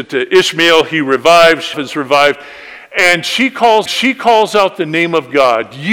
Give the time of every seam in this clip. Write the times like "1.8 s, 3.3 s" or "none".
1.7 s, 3.9 s